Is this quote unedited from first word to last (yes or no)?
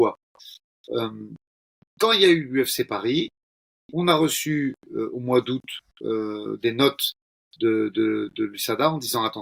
yes